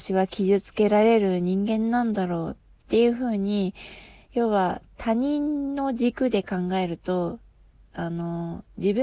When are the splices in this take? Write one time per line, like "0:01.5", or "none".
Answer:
none